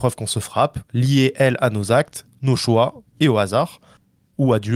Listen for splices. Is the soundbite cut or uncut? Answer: uncut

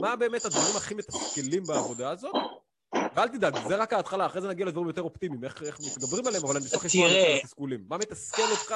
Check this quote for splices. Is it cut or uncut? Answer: uncut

